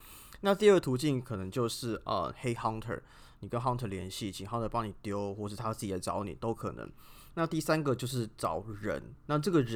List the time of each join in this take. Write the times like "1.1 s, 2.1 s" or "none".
none